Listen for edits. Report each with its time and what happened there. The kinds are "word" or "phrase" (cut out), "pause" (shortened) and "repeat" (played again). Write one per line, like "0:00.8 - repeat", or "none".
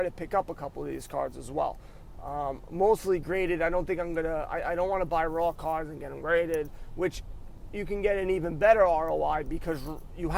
none